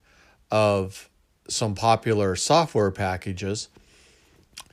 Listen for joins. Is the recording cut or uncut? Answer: uncut